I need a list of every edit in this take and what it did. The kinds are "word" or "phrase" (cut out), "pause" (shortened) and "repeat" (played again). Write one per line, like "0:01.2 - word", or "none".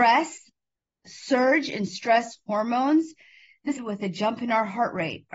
0:01.0 - word
0:03.8 - phrase